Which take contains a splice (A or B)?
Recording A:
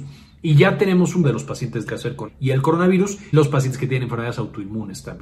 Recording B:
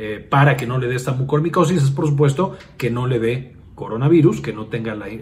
A